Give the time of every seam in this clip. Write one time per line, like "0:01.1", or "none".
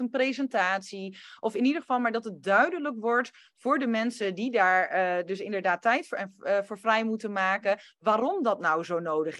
none